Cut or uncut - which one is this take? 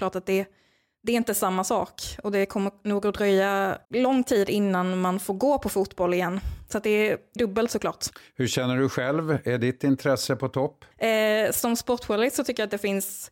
cut